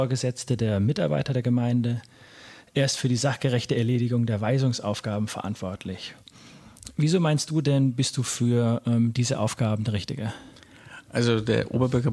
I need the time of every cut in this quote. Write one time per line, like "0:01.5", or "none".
none